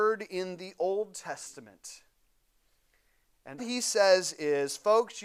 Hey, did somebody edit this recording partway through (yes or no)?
yes